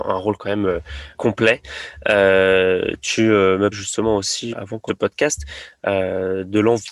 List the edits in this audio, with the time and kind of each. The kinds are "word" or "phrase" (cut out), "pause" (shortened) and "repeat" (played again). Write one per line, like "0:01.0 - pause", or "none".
0:01.1 - word
0:03.7 - word
0:04.5 - word
0:04.9 - word